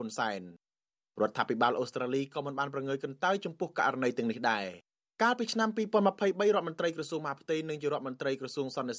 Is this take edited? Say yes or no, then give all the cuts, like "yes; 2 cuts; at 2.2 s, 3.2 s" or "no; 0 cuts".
no; 0 cuts